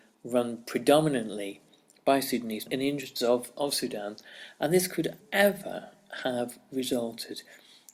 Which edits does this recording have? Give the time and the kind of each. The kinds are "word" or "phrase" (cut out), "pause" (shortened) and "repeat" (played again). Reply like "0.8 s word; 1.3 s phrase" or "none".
2.7 s word; 3.5 s word; 5.2 s word